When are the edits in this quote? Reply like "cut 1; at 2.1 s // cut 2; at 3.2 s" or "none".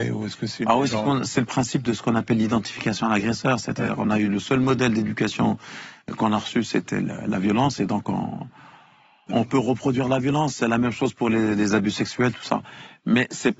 none